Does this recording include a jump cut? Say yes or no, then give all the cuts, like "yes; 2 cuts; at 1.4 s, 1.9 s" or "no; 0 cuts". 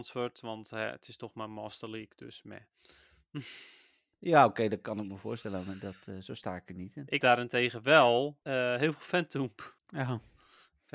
yes; 3 cuts; at 7.2 s, 8.4 s, 9.8 s